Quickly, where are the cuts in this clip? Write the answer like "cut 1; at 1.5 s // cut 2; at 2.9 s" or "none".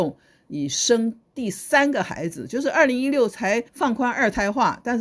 cut 1; at 3.7 s